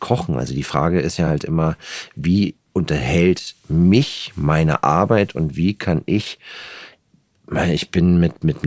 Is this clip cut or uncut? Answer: uncut